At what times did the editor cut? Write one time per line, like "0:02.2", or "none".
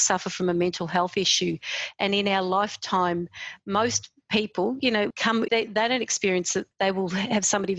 0:05.1
0:05.5
0:06.7